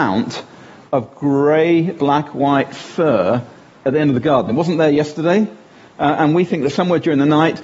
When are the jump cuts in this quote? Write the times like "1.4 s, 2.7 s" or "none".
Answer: none